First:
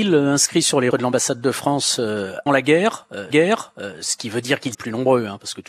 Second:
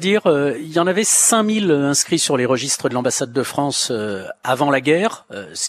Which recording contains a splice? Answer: first; 4 cuts; at 0.9 s, 2.5 s, 3.3 s, 4.7 s

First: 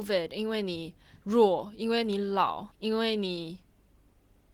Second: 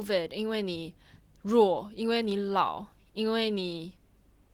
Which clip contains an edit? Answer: first; 2 cuts; at 1.2 s, 2.7 s

